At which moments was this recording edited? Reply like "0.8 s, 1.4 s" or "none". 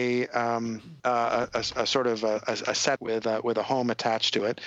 1.0 s, 3.0 s